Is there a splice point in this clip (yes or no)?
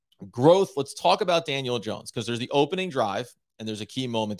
no